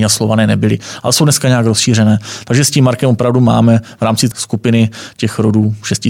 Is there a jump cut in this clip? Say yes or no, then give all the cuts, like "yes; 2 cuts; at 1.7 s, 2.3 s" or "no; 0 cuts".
yes; 1 cut; at 4.3 s